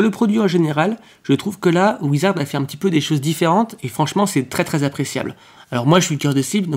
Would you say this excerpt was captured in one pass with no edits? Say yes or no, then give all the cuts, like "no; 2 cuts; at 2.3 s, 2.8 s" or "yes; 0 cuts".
yes; 0 cuts